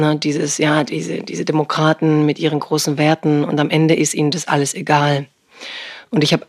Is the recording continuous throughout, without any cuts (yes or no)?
yes